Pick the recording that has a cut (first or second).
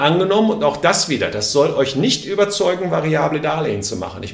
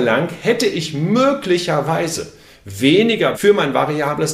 second